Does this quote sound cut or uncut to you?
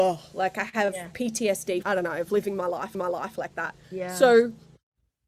cut